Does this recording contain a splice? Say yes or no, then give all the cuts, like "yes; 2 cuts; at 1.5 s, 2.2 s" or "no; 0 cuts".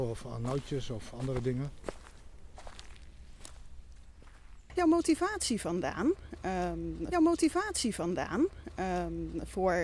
yes; 2 cuts; at 4.8 s, 7.1 s